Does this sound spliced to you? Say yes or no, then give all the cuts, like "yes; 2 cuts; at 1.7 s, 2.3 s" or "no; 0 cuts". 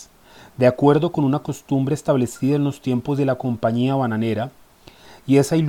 no; 0 cuts